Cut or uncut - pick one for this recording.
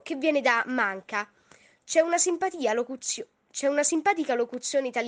uncut